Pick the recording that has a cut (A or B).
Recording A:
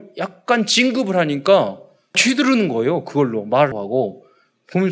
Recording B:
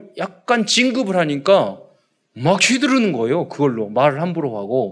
A